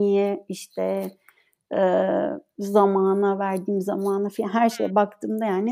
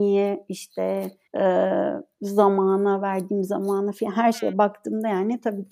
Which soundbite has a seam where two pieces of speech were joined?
second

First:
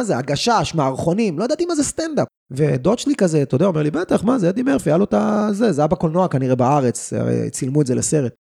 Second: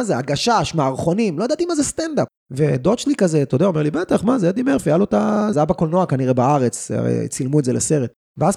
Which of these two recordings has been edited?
second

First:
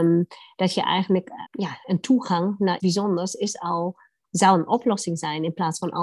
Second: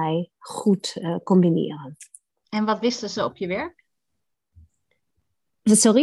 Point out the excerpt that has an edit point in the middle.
first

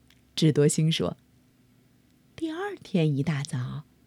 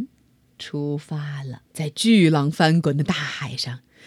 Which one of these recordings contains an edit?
second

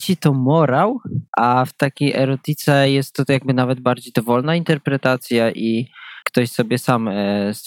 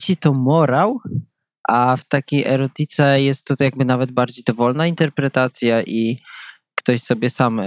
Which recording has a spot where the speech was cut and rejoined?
first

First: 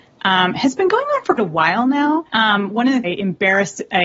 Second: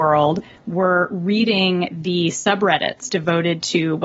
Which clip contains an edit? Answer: first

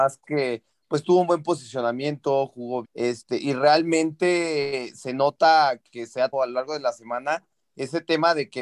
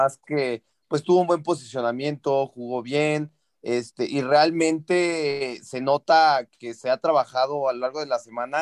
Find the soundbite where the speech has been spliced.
first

